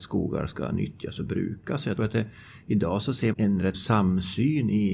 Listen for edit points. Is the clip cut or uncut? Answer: cut